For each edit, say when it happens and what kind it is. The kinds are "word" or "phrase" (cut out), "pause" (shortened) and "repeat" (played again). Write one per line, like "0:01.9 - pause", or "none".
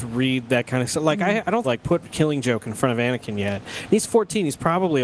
0:01.6 - phrase